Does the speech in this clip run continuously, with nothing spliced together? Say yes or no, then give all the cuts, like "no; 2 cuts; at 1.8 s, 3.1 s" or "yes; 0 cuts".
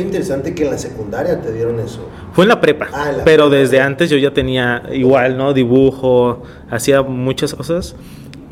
no; 1 cut; at 7.5 s